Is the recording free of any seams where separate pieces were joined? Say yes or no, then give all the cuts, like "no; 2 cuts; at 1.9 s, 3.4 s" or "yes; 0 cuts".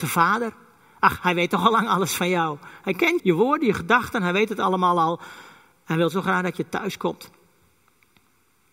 no; 1 cut; at 3.2 s